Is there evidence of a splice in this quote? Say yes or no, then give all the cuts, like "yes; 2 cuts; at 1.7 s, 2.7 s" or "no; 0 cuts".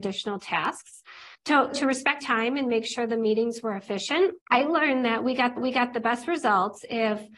yes; 5 cuts; at 1.3 s, 1.7 s, 2.2 s, 4.4 s, 5.6 s